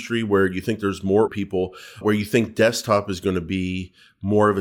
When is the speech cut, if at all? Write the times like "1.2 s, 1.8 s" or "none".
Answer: 1.3 s, 2.0 s